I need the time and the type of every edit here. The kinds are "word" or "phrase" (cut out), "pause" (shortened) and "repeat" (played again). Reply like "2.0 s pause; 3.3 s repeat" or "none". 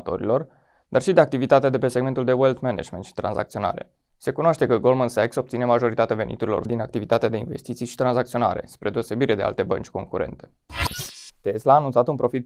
4.1 s pause; 6.6 s word

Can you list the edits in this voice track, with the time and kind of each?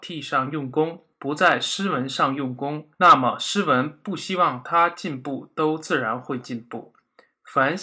1.1 s pause; 2.9 s pause

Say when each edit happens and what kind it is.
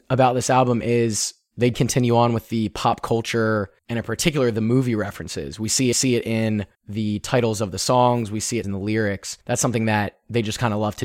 1.7 s word; 3.8 s pause; 5.9 s repeat; 6.7 s pause; 8.6 s word; 9.4 s pause

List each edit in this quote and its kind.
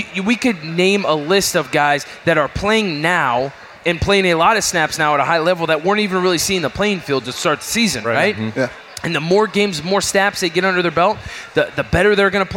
none

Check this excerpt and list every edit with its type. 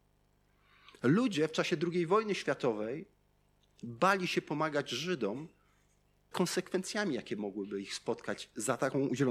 6.3 s word

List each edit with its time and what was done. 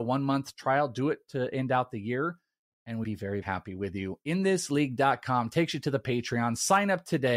3.0 s word; 3.4 s word

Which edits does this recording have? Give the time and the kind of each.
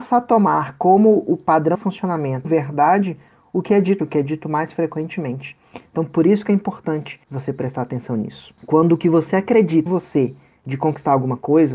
1.7 s word; 2.4 s word; 4.0 s word; 7.2 s pause; 8.6 s pause; 9.9 s word

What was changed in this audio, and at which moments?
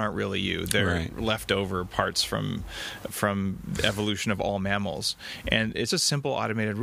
3.1 s word; 5.9 s word

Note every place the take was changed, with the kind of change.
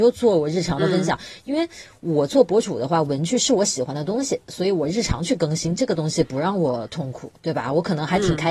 7.4 s pause

